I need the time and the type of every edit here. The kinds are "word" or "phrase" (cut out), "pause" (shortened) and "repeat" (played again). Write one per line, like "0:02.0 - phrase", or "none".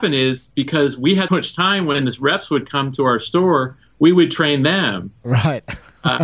0:01.3 - word